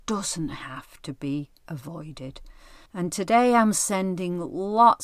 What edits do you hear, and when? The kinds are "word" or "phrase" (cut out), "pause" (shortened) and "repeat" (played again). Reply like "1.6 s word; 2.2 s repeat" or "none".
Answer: 2.9 s pause